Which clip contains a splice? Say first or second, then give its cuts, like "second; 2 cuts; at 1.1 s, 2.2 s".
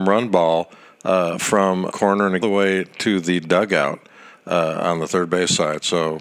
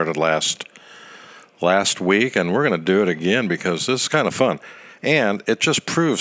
first; 2 cuts; at 1.9 s, 2.4 s